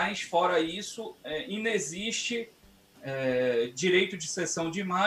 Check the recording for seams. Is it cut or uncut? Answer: uncut